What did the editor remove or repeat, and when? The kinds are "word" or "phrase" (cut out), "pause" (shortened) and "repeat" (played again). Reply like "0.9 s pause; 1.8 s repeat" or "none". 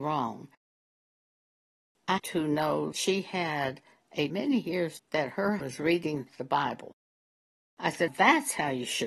2.2 s word; 2.9 s word; 4.3 s word; 5.0 s word; 5.6 s word; 8.1 s word